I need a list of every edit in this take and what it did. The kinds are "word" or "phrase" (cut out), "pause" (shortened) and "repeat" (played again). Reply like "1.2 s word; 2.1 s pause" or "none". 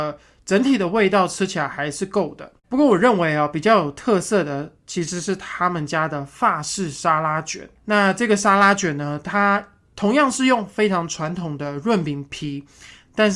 2.6 s pause; 7.8 s pause